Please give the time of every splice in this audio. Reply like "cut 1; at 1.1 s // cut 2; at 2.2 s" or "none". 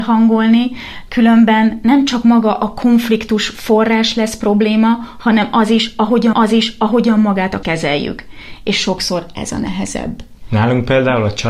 cut 1; at 6.3 s // cut 2; at 7.6 s